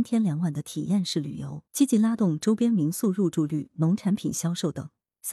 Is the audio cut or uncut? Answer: cut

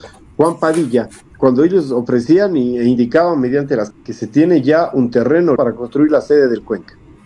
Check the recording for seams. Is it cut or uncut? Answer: cut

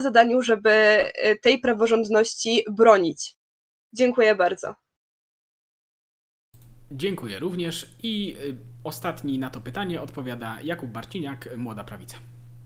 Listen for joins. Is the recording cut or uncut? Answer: uncut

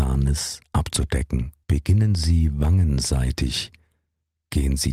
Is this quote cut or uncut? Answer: cut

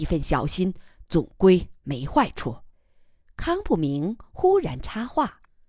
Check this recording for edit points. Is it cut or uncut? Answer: cut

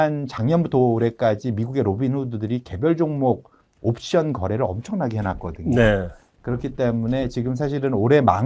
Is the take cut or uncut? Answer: uncut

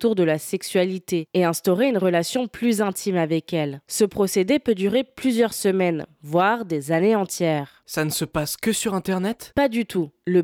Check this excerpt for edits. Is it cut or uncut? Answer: uncut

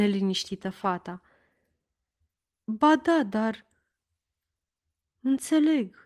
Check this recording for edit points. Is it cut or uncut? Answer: uncut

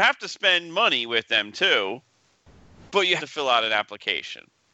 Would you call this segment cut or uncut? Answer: cut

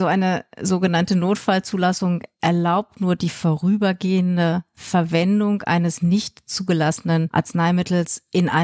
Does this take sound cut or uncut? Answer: uncut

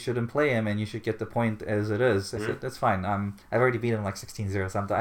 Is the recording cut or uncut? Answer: cut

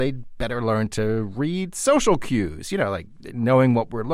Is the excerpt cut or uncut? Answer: uncut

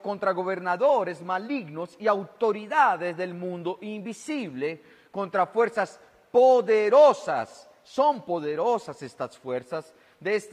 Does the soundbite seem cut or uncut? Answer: uncut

